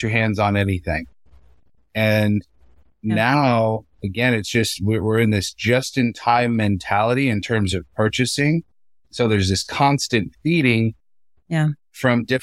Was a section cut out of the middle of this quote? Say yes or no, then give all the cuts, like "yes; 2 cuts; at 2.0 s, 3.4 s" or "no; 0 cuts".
no; 0 cuts